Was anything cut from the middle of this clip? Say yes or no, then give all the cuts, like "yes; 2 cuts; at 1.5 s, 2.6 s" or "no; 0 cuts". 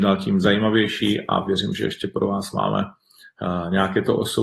no; 0 cuts